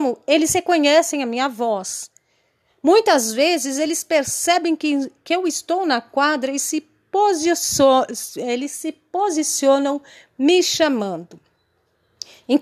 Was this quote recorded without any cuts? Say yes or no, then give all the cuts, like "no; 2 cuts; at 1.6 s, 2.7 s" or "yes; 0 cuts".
yes; 0 cuts